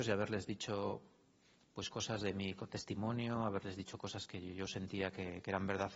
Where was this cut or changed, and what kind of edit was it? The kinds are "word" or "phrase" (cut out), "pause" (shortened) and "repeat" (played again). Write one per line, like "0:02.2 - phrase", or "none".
none